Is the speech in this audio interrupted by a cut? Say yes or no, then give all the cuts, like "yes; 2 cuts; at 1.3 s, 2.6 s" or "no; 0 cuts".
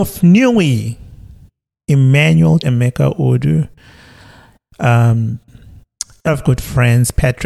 yes; 2 cuts; at 2.6 s, 6.3 s